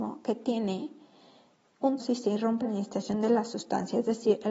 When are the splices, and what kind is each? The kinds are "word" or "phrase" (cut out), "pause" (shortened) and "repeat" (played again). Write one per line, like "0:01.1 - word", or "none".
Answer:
0:02.0 - word
0:02.6 - word